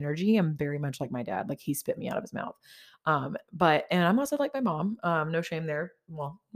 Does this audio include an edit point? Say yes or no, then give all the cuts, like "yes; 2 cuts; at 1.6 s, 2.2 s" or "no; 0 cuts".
no; 0 cuts